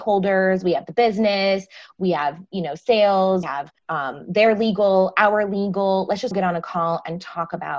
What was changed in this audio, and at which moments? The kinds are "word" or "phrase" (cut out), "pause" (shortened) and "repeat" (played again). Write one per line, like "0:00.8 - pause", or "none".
0:03.4 - word
0:03.8 - pause
0:06.3 - word